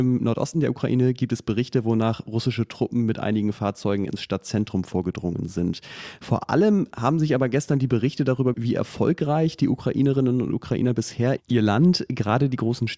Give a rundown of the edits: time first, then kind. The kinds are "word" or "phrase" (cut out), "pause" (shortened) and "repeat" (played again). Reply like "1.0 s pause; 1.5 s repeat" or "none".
8.5 s word

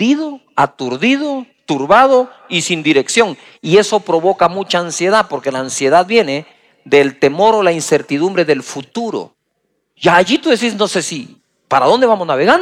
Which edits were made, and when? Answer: none

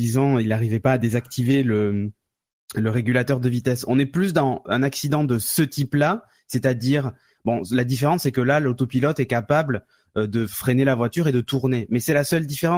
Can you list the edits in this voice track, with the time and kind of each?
none

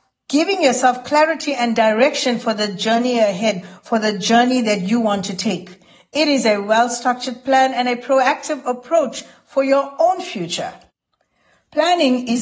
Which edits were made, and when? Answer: none

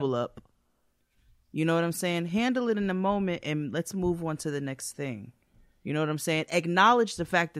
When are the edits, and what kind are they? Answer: none

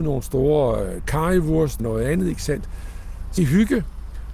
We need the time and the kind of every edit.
1.8 s word; 3.4 s word

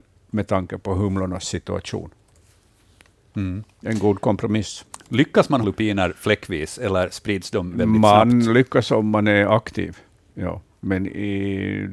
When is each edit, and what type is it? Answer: 5.6 s word

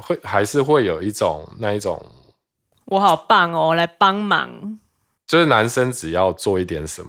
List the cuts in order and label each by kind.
none

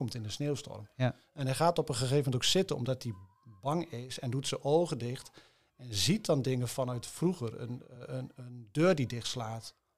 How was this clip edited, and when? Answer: none

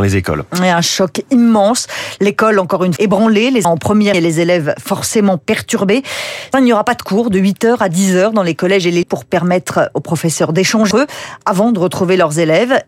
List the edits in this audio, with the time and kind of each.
3.0 s word; 3.6 s word; 4.1 s word; 6.5 s word; 9.0 s word; 10.9 s word

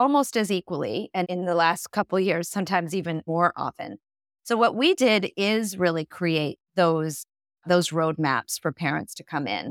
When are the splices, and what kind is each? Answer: 1.2 s word; 3.3 s word

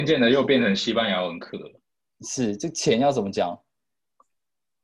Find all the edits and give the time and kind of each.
none

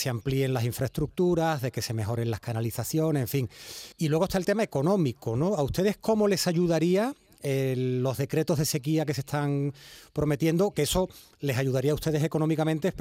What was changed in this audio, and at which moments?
3.9 s pause

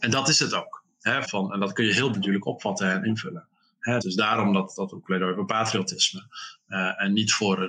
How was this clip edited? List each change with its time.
1.2 s word; 2.1 s word; 4.0 s word

